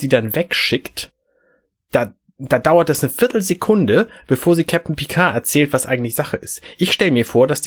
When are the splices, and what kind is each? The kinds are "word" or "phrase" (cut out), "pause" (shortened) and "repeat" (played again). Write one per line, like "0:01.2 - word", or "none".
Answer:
none